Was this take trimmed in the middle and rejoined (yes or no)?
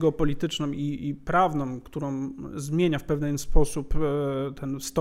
no